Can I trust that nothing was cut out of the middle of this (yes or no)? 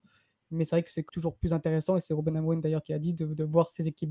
no